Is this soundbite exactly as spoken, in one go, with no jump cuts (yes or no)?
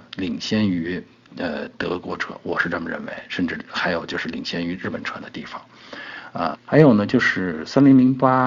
no